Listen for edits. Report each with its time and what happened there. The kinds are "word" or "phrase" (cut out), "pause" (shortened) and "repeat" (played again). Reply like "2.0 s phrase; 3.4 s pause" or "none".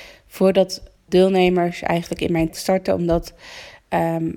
1.1 s word; 2.5 s word